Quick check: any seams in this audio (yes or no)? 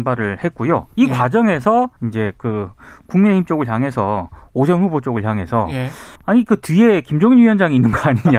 yes